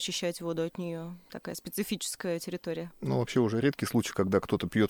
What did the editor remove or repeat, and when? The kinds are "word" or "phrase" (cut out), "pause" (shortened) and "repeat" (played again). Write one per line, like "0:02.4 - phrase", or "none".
none